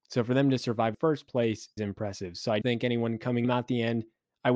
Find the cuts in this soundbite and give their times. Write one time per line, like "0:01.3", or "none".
0:00.9
0:01.8
0:02.6
0:03.4

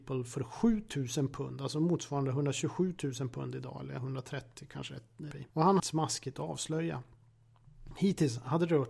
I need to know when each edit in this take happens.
0:05.3
0:05.8

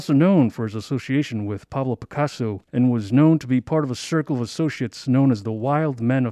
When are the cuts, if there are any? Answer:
0:02.6

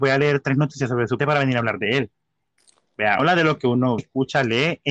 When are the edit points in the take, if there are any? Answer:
0:01.2
0:03.2
0:04.0

